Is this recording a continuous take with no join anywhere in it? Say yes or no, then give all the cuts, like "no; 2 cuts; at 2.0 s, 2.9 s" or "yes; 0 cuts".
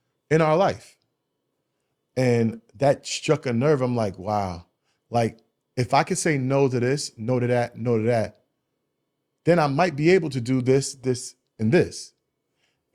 yes; 0 cuts